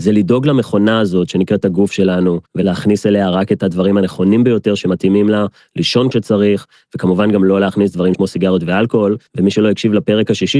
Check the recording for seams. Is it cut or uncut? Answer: cut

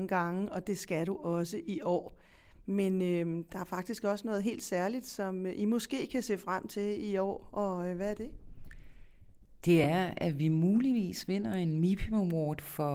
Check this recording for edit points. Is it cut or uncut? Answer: uncut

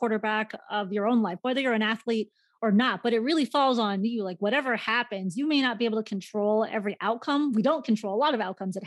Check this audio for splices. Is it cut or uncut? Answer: uncut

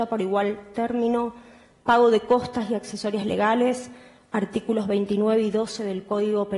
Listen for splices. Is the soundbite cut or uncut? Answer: uncut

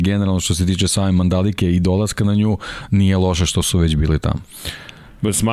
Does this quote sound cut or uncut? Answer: uncut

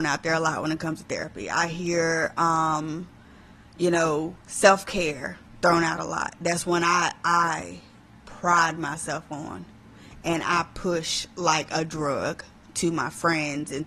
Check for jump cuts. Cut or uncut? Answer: uncut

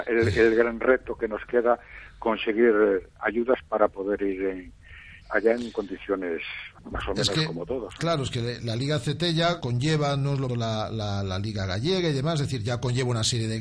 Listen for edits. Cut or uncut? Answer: cut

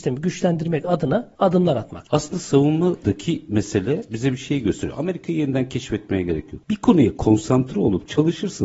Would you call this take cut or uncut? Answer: uncut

